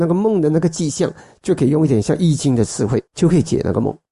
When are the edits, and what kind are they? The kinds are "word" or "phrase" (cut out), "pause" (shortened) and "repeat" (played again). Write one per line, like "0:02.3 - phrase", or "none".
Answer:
0:03.1 - pause